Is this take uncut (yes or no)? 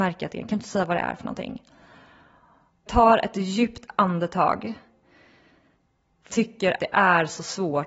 no